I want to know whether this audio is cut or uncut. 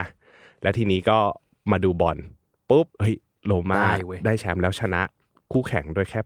cut